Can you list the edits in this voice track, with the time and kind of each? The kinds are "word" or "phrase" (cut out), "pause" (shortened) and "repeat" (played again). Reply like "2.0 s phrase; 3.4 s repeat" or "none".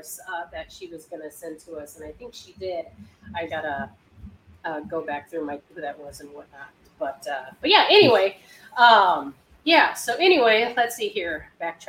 3.5 s word; 5.6 s phrase